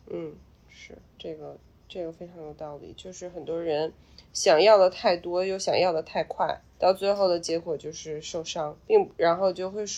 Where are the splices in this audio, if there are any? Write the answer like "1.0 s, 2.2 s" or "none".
6.8 s, 8.8 s